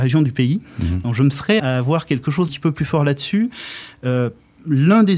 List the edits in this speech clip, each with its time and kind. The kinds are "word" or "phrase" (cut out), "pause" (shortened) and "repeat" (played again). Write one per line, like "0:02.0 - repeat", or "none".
0:01.6 - word
0:02.5 - word